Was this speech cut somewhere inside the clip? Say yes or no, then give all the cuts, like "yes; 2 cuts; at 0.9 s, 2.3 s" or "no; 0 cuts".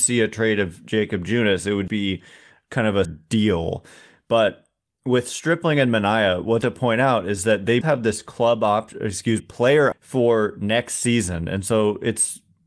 yes; 6 cuts; at 1.9 s, 3.0 s, 6.6 s, 7.8 s, 9.4 s, 9.9 s